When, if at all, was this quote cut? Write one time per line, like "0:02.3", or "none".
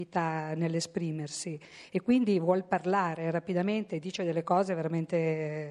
none